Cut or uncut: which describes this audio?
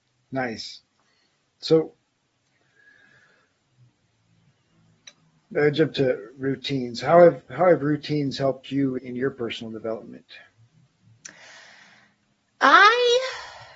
cut